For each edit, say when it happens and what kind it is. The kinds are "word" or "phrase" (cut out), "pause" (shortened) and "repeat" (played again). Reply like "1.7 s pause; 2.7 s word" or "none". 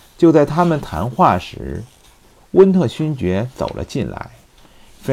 none